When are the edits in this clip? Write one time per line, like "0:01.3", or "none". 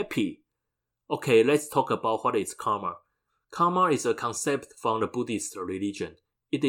none